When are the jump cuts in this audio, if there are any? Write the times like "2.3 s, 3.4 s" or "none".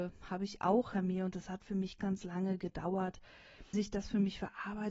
0.9 s, 2.0 s, 3.7 s